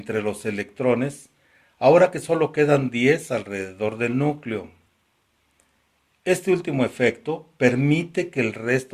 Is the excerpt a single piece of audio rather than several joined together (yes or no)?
yes